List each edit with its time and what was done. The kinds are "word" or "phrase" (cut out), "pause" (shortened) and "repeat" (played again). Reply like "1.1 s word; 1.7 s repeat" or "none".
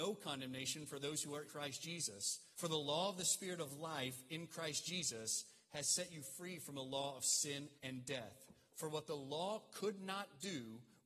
1.5 s word; 2.5 s pause; 7.8 s pause